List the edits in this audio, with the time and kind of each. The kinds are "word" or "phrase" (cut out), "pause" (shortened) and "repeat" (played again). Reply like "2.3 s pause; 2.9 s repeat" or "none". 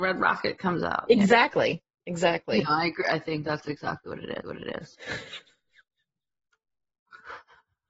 4.4 s repeat